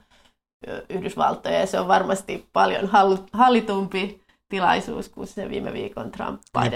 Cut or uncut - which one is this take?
uncut